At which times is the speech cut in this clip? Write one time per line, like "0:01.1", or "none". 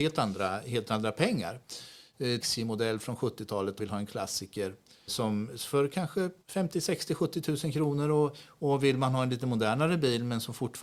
0:02.4
0:03.8
0:05.1
0:06.4